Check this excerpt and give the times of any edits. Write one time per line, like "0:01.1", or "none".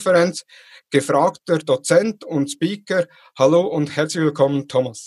none